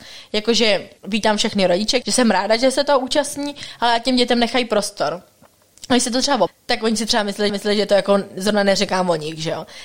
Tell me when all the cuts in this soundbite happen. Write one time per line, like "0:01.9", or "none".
0:01.0
0:02.0
0:06.5
0:07.5

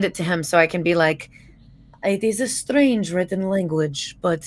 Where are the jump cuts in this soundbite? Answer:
none

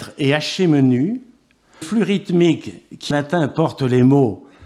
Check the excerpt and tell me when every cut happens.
0:01.8
0:03.1

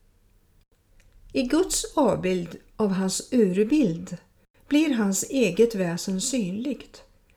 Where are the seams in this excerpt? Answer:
none

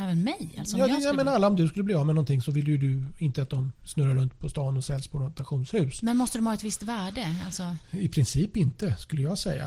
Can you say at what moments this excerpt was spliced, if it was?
0:03.8

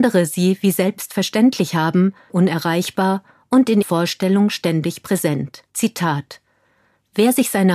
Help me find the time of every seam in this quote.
0:02.3
0:03.8
0:05.7

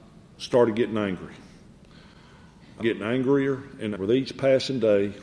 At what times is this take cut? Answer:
0:02.8
0:03.9

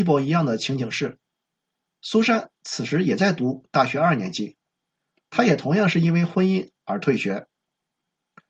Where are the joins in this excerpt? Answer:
0:02.5

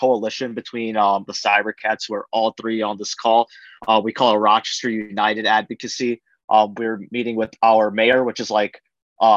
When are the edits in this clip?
0:01.3

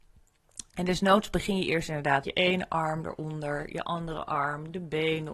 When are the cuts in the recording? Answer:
0:02.2

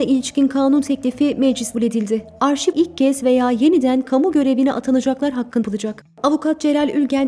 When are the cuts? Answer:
0:01.7
0:02.7
0:05.6

